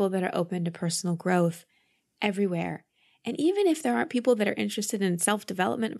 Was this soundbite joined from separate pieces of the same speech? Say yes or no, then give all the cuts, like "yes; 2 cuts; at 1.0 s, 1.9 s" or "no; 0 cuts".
no; 0 cuts